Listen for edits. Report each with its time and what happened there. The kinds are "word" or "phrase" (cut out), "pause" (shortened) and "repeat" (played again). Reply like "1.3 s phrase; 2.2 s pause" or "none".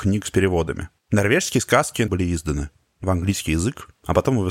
1.0 s pause; 2.1 s word; 3.0 s word